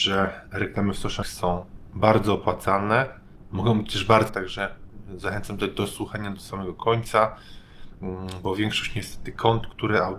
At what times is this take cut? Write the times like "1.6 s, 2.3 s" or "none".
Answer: 1.2 s, 4.3 s